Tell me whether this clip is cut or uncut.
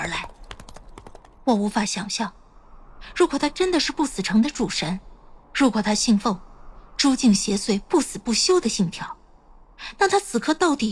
cut